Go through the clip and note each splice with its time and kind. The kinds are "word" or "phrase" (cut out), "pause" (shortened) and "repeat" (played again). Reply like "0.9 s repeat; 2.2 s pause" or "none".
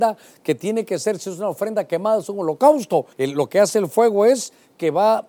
3.1 s pause